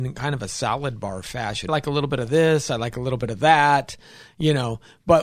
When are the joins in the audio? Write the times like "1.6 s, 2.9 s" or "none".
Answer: 1.7 s